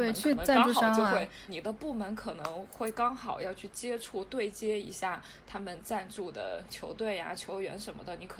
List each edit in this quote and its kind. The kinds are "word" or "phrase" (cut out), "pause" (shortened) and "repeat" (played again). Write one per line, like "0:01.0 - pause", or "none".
0:01.5 - phrase